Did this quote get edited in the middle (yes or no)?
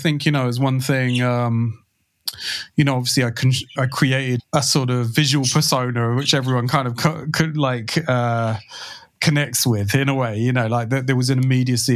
yes